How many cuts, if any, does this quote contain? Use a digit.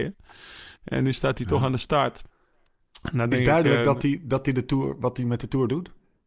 0